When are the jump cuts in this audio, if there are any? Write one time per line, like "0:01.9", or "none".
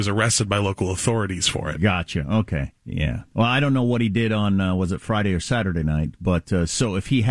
0:02.8